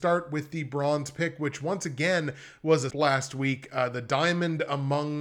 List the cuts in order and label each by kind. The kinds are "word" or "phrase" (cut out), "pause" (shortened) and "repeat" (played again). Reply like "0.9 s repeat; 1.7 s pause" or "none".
2.9 s word